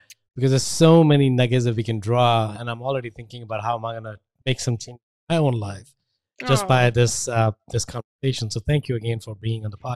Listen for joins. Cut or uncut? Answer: uncut